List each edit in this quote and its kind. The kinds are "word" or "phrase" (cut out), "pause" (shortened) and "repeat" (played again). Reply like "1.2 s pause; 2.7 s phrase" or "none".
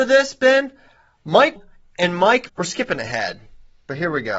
1.6 s word; 2.5 s word